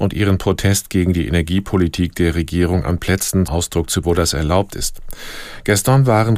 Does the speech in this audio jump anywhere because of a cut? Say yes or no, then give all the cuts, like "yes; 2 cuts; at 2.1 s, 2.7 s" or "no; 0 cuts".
yes; 2 cuts; at 3.5 s, 4.0 s